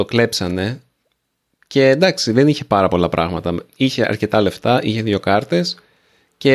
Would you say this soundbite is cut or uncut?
uncut